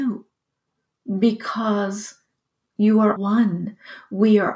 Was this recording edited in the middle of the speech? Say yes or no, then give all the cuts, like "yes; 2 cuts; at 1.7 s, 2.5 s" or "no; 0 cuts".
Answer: yes; 2 cuts; at 2.6 s, 3.2 s